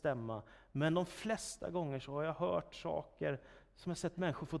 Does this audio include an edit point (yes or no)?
no